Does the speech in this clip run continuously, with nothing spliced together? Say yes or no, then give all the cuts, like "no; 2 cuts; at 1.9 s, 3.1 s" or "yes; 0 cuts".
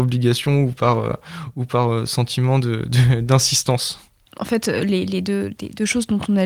yes; 0 cuts